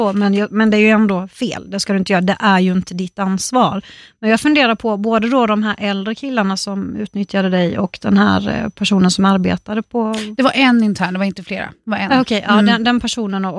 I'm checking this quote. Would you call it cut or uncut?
uncut